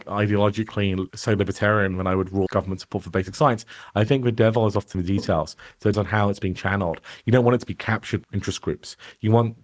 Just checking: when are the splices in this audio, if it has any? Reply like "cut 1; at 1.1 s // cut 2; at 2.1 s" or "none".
cut 1; at 2.5 s // cut 2; at 4.9 s // cut 3; at 5.9 s // cut 4; at 8.2 s